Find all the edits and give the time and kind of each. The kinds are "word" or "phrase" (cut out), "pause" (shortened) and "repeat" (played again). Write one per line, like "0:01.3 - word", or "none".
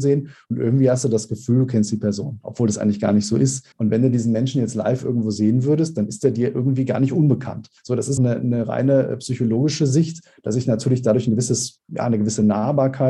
0:03.7 - pause
0:07.8 - pause
0:08.2 - word